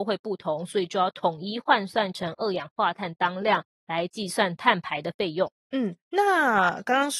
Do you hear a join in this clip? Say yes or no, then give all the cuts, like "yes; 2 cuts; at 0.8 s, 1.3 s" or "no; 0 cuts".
yes; 1 cut; at 5.6 s